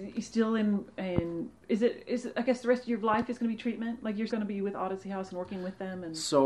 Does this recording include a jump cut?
yes; 2 cuts; at 1.6 s, 4.3 s

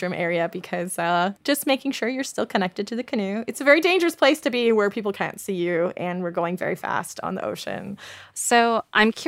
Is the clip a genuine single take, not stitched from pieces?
no; 1 cut; at 1.4 s

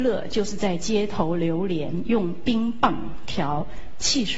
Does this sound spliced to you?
no; 0 cuts

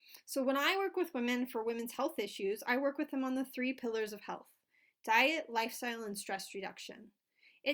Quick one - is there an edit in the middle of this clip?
no; 0 cuts

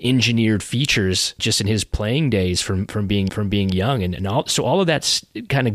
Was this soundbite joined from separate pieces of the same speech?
yes; 2 cuts; at 1.4 s, 3.3 s

